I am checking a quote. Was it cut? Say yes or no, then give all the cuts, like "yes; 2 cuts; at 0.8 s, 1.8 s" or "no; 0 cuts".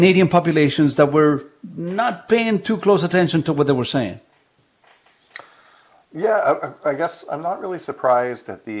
no; 0 cuts